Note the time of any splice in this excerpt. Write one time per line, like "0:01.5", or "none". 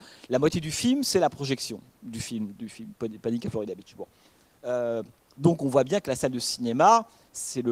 none